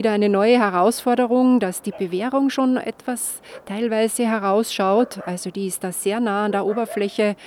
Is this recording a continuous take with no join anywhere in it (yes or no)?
yes